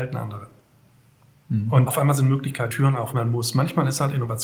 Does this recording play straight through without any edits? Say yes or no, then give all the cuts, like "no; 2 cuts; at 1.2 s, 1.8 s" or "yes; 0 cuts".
no; 3 cuts; at 1.9 s, 2.7 s, 3.1 s